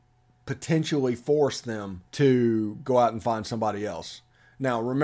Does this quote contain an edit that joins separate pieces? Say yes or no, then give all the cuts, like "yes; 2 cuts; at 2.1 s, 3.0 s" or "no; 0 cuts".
yes; 1 cut; at 2.1 s